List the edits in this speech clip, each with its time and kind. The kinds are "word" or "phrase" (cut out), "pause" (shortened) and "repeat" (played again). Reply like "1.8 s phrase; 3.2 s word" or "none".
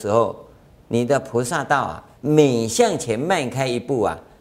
2.2 s pause